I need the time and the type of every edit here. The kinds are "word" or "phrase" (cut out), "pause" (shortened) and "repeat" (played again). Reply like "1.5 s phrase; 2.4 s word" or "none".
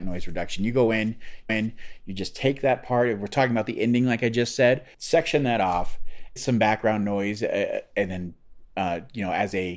1.5 s repeat; 4.9 s pause; 6.4 s phrase